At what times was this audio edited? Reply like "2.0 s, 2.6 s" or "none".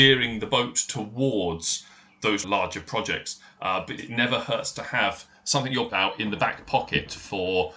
2.4 s, 4.0 s, 5.9 s